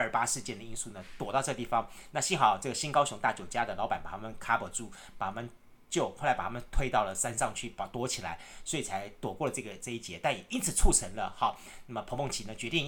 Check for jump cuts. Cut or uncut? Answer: uncut